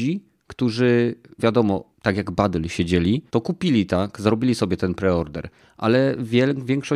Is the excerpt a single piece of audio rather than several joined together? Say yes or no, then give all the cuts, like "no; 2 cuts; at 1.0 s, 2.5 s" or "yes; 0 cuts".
no; 3 cuts; at 1.4 s, 1.9 s, 3.3 s